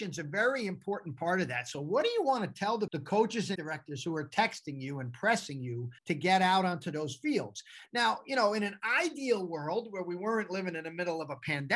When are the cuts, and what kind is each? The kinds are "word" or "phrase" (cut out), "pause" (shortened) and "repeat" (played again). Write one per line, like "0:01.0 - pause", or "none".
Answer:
0:02.9 - word
0:03.5 - word
0:06.0 - pause